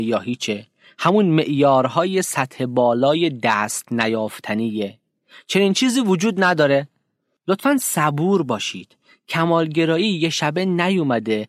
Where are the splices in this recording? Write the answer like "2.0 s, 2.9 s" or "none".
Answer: none

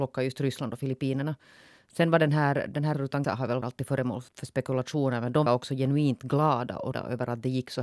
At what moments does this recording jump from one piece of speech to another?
2.9 s, 3.2 s, 3.6 s, 4.3 s, 5.5 s, 6.9 s

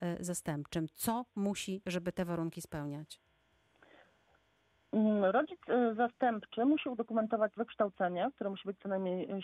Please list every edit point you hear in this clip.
1.8 s, 7.6 s

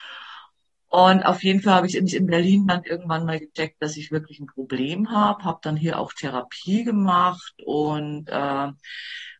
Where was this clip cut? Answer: 2.1 s

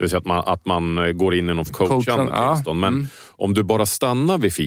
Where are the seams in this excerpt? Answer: 1.7 s

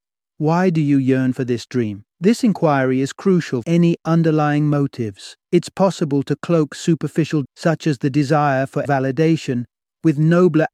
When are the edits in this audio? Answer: 2.1 s, 3.6 s, 5.4 s, 7.4 s, 8.8 s

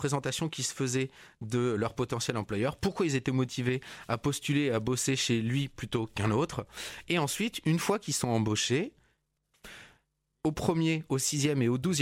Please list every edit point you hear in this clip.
none

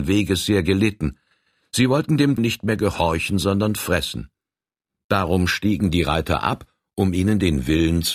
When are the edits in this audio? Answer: 2.4 s

